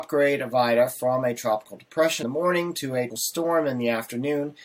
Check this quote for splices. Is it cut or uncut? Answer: cut